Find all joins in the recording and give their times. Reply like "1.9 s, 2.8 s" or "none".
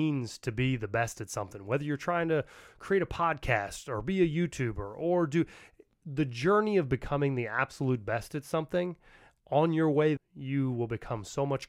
10.2 s